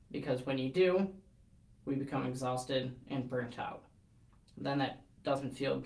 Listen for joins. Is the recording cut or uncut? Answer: uncut